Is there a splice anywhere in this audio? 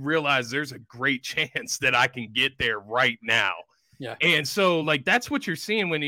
no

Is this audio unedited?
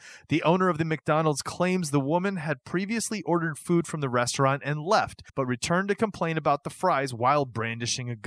no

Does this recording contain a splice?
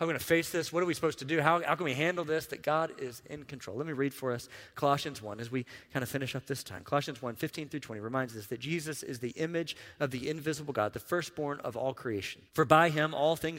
yes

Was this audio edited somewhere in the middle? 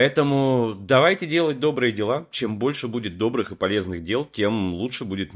no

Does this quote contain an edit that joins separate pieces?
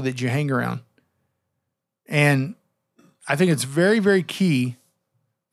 no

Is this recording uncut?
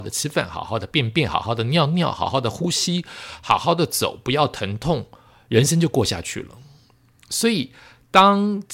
yes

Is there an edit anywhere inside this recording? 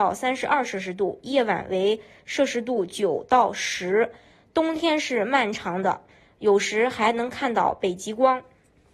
no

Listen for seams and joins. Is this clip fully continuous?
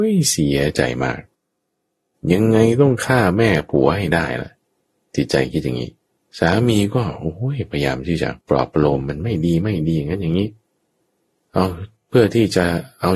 no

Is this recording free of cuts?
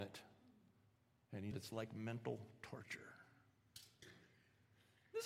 no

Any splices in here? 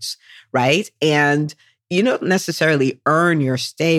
no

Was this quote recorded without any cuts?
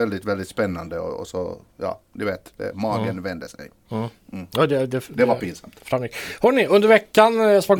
no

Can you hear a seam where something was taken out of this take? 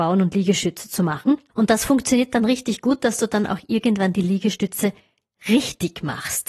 yes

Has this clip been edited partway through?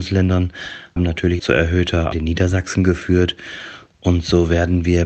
yes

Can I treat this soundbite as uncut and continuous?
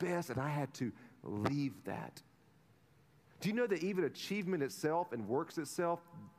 yes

